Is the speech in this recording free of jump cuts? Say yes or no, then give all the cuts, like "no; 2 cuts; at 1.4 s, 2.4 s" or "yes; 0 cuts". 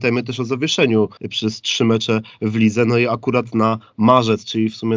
no; 1 cut; at 1.2 s